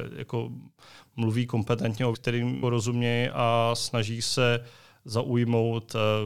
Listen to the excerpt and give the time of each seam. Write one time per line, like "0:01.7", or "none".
0:02.1
0:02.6